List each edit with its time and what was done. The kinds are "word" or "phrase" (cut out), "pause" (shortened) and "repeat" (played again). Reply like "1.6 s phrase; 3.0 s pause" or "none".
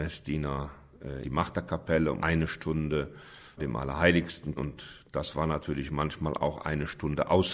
1.2 s word; 2.2 s word; 3.6 s word; 4.6 s word